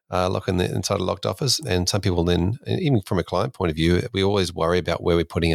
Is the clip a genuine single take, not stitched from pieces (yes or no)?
no